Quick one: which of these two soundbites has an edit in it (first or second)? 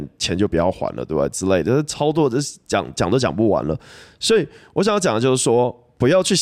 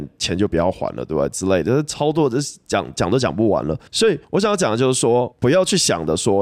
second